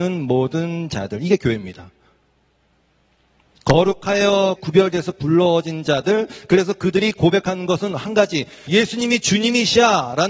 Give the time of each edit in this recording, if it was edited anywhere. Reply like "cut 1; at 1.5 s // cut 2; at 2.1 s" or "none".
cut 1; at 4.6 s // cut 2; at 8.7 s